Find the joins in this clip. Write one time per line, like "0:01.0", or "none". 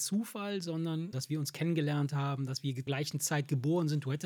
0:01.1
0:02.9